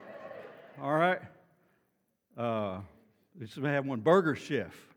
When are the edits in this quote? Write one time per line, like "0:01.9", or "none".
none